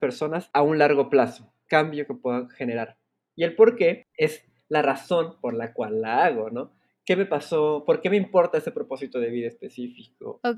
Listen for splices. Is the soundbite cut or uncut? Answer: cut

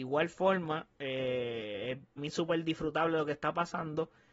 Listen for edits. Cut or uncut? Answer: cut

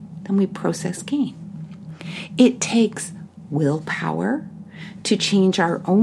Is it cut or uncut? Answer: uncut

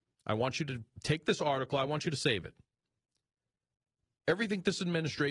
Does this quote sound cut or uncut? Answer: uncut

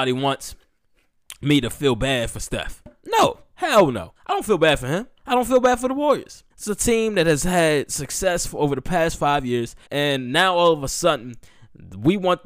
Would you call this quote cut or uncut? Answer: cut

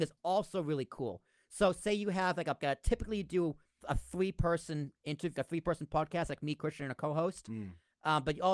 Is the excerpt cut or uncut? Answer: cut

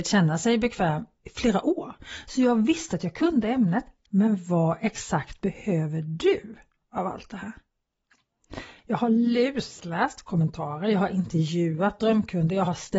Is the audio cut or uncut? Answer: cut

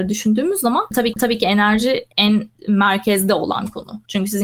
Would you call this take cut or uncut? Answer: cut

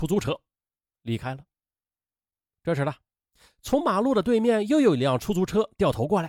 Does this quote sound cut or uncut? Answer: uncut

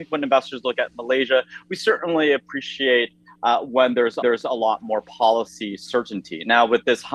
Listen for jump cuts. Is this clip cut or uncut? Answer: cut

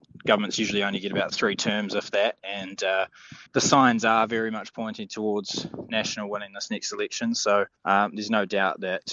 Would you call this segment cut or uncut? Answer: cut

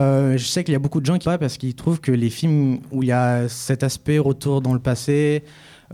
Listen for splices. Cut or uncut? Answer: cut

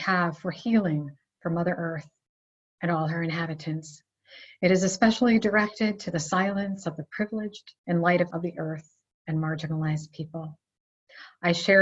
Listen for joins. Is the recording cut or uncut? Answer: cut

